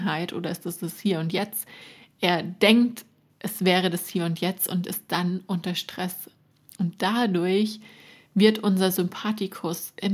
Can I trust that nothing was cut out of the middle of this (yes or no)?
yes